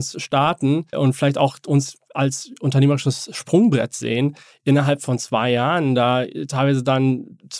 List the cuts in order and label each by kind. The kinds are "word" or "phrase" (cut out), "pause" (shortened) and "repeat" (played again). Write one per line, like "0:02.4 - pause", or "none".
0:00.9 - word